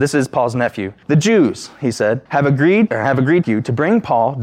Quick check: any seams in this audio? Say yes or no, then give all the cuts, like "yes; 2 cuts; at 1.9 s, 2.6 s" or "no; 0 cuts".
yes; 4 cuts; at 1.0 s, 2.3 s, 2.9 s, 3.4 s